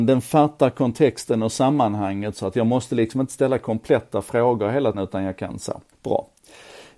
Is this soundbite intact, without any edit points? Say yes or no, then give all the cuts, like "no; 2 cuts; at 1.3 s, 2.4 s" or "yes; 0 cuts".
no; 2 cuts; at 4.9 s, 5.9 s